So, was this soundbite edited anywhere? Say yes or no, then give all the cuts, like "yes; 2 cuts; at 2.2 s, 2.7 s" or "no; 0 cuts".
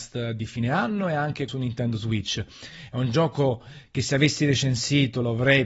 yes; 1 cut; at 1.5 s